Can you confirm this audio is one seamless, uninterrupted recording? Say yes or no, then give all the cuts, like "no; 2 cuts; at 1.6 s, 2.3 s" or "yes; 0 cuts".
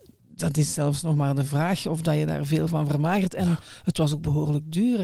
yes; 0 cuts